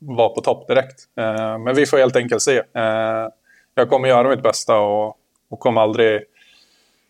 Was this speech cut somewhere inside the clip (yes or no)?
no